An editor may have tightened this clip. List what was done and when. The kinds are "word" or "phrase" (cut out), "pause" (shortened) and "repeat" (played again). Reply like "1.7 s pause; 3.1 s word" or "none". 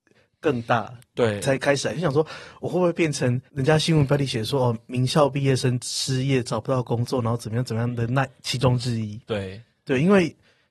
3.5 s pause